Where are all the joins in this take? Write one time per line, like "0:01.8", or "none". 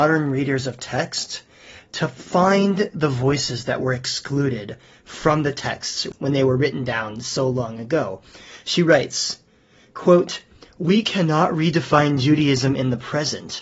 none